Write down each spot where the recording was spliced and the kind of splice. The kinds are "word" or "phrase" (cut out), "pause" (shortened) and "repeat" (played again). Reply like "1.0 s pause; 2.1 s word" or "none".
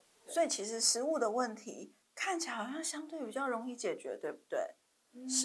2.0 s pause